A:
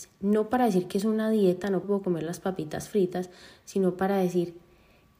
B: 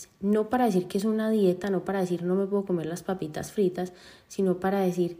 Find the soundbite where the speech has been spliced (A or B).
A